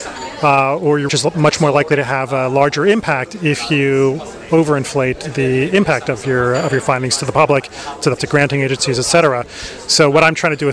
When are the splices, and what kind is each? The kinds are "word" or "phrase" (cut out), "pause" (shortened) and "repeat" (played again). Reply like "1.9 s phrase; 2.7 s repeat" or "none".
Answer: 1.1 s word; 8.2 s word